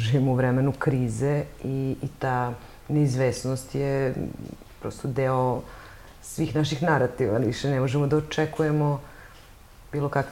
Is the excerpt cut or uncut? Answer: uncut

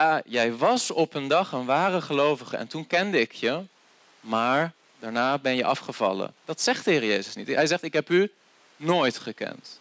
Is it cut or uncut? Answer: uncut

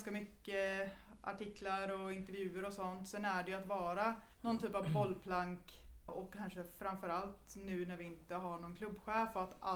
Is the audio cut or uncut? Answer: cut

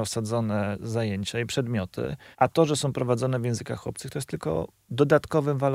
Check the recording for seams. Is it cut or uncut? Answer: cut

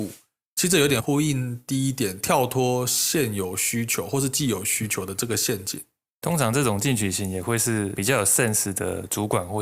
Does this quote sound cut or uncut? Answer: uncut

